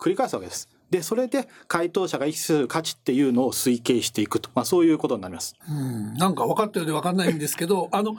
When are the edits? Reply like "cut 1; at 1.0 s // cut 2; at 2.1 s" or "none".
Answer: cut 1; at 5.6 s